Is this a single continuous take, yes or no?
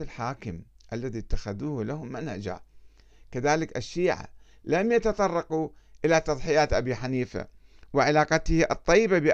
yes